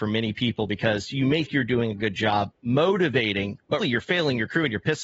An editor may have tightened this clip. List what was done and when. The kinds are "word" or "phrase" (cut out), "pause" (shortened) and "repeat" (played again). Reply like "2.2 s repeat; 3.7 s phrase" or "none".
1.5 s word; 2.5 s pause; 3.8 s word